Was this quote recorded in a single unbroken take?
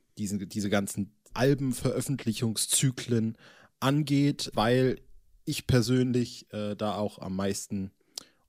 no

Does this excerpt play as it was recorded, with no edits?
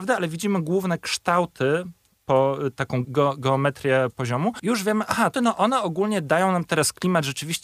no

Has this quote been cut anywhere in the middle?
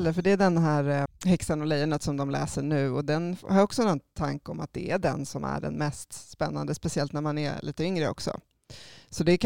yes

